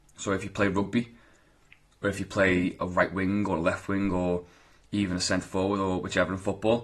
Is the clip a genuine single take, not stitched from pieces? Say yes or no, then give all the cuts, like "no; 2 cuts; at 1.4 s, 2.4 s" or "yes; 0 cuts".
yes; 0 cuts